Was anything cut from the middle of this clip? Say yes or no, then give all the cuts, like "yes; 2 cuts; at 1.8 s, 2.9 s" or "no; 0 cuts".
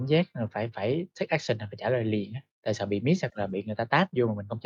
no; 0 cuts